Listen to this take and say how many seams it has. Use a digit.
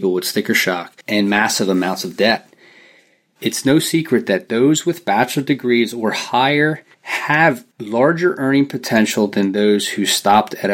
2